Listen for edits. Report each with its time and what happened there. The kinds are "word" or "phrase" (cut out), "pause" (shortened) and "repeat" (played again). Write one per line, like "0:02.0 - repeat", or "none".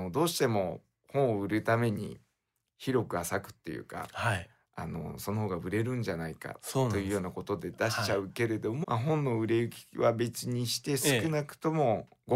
0:08.8 - phrase